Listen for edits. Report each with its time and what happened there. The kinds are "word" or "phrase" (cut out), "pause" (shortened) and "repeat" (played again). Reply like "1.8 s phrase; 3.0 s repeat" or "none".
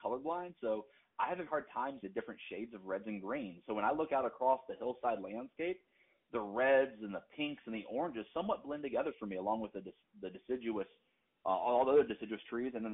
1.5 s word; 2.0 s word